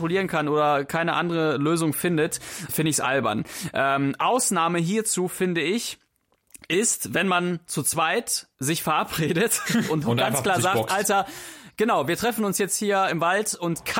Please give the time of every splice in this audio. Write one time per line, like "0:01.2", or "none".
0:02.7
0:08.5
0:10.0

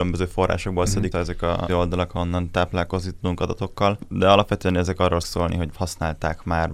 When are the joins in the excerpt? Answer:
0:01.1
0:01.7
0:05.2

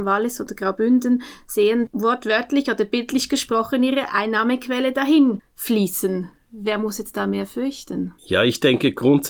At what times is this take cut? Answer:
0:08.2

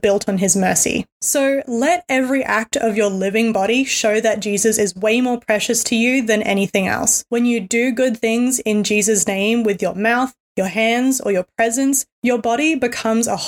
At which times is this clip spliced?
0:12.1

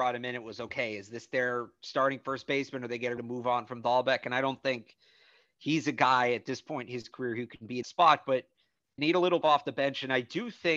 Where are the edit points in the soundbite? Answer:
0:03.2
0:07.8
0:09.0
0:09.4

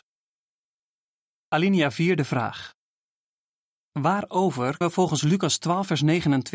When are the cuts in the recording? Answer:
0:04.8

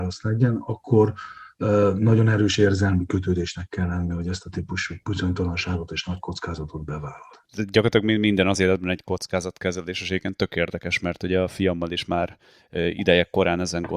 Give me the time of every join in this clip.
none

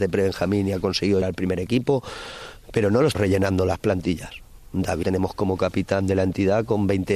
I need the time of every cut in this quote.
0:01.2
0:03.1
0:05.0

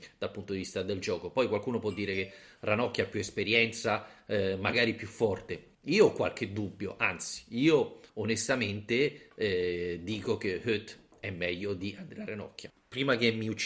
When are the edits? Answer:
0:05.7
0:08.1

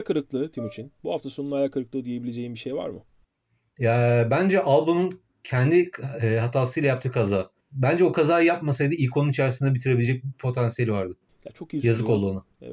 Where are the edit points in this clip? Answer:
0:03.2
0:05.3
0:07.6

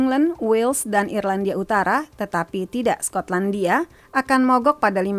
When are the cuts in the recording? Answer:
none

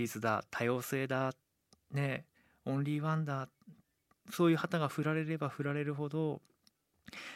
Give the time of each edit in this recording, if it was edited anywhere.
none

